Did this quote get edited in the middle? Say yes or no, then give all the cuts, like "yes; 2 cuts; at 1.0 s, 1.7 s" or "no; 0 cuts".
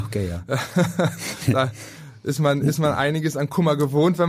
no; 0 cuts